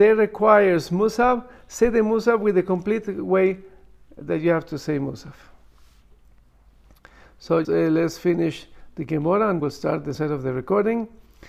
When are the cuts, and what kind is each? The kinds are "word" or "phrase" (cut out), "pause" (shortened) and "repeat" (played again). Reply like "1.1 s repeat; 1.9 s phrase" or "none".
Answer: 7.6 s word; 9.6 s word; 10.1 s word